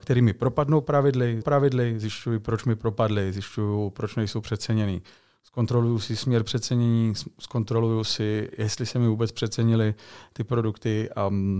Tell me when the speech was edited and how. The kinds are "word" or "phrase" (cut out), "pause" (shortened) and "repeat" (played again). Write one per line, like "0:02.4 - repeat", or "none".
0:01.4 - repeat